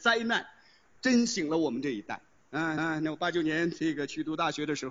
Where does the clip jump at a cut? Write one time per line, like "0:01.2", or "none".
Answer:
0:02.8